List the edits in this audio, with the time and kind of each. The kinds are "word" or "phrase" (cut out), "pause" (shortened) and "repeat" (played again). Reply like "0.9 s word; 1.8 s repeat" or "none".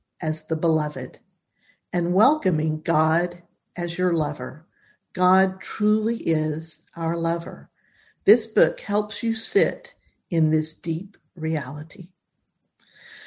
none